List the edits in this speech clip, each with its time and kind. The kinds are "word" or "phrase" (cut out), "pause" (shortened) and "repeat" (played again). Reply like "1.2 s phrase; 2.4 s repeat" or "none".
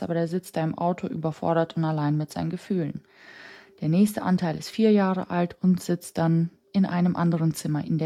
none